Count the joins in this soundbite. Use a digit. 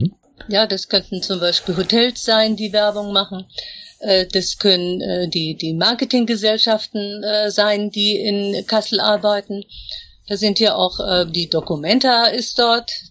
0